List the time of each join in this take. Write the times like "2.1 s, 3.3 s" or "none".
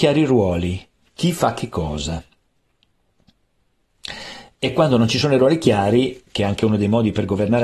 none

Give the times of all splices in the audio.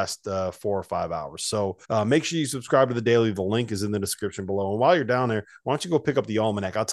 1.8 s

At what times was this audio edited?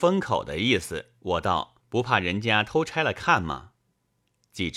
1.2 s, 1.8 s

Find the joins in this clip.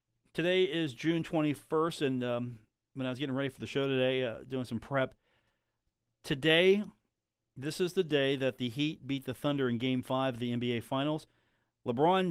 none

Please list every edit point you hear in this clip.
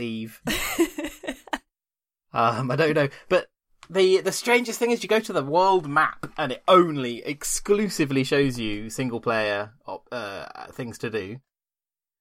none

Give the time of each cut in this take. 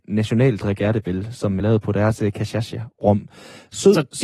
1.6 s

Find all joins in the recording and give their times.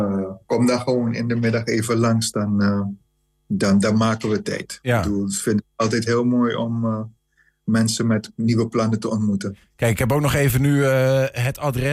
none

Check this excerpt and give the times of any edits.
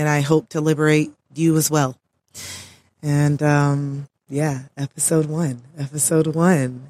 4.2 s

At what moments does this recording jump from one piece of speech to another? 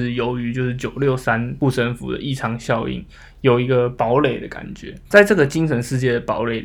5.1 s

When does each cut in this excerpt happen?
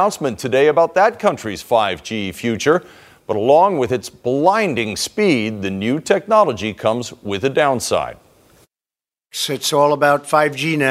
none

